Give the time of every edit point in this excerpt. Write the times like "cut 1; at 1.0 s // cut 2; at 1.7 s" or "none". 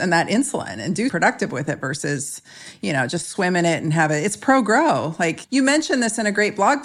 cut 1; at 1.1 s // cut 2; at 5.4 s